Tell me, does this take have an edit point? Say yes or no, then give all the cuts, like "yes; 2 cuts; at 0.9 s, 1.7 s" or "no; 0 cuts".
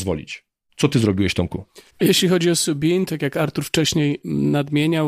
yes; 1 cut; at 1.9 s